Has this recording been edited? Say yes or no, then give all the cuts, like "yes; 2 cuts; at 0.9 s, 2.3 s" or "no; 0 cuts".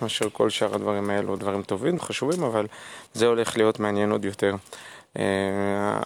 yes; 3 cuts; at 1.4 s, 2.0 s, 3.1 s